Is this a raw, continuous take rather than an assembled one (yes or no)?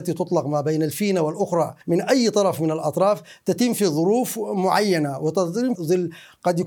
no